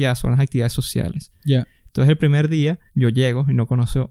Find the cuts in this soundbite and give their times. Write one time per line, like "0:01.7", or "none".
0:02.9